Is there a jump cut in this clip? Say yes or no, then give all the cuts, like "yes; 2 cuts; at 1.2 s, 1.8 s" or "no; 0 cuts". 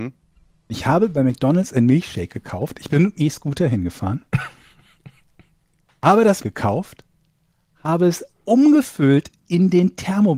yes; 2 cuts; at 3.1 s, 6.4 s